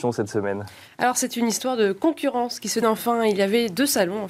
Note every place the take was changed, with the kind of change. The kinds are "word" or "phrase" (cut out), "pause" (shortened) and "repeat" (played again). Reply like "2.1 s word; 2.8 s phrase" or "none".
2.8 s word